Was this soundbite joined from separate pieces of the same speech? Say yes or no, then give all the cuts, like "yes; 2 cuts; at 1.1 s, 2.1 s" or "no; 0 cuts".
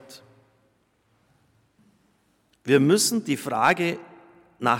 no; 0 cuts